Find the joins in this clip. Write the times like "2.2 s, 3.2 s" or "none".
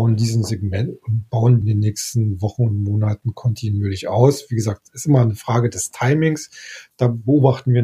1.6 s